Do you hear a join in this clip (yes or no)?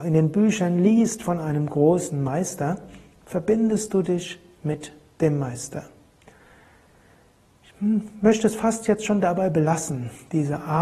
no